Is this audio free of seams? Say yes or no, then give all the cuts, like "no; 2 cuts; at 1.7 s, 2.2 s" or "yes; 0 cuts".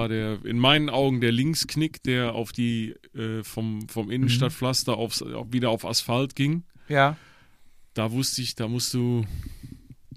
yes; 0 cuts